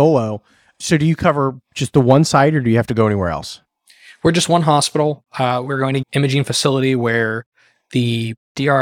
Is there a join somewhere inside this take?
yes; 1 cut; at 6.0 s

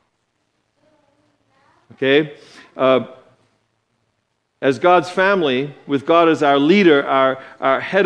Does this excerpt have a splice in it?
no; 0 cuts

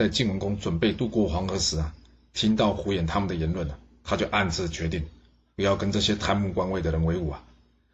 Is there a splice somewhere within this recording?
no; 0 cuts

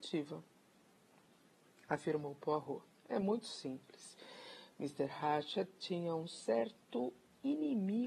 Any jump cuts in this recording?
no; 0 cuts

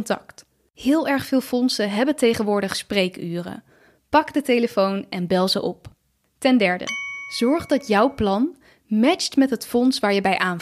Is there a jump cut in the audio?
no; 0 cuts

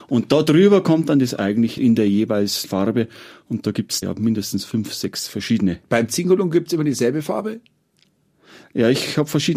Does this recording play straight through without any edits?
no; 3 cuts; at 1.8 s, 2.6 s, 4.0 s

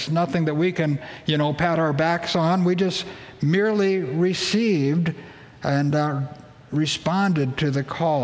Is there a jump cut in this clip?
no; 0 cuts

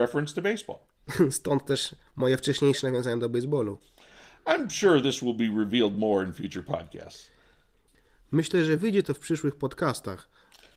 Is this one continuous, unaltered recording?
yes; 0 cuts

